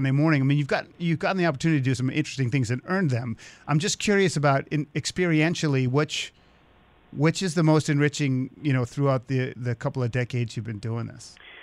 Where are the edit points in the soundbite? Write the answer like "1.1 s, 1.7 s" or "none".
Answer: none